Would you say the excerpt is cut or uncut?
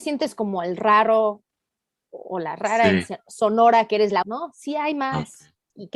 cut